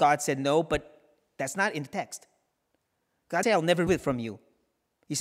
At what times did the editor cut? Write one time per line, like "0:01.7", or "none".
0:03.4
0:03.9